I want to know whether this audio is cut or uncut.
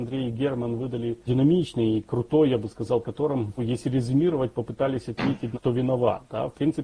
cut